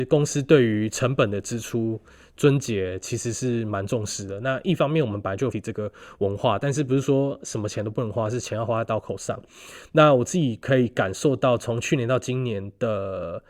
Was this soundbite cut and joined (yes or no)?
yes